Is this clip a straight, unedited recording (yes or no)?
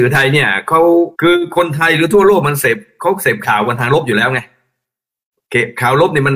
no